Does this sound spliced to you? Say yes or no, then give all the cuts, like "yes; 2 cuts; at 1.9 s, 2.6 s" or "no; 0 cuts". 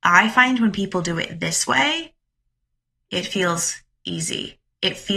no; 0 cuts